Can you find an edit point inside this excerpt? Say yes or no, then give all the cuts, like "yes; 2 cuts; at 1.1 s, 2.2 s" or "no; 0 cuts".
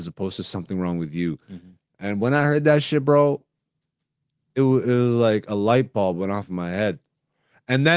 no; 0 cuts